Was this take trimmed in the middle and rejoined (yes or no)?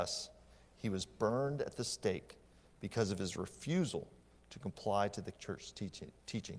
yes